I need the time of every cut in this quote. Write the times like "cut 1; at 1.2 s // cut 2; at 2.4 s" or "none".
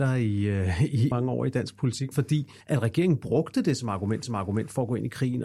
cut 1; at 1.1 s // cut 2; at 2.1 s // cut 3; at 2.6 s // cut 4; at 4.2 s